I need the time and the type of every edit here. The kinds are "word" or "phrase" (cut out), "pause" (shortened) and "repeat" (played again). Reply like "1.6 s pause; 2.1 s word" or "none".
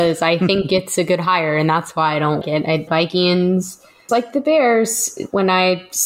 2.4 s word; 2.9 s word; 4.1 s word